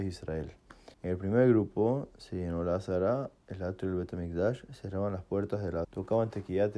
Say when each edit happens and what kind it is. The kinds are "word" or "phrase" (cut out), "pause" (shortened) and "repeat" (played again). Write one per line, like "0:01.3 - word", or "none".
0:00.9 - pause
0:03.4 - pause
0:05.8 - word